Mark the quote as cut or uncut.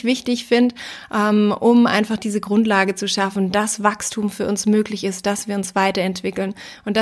uncut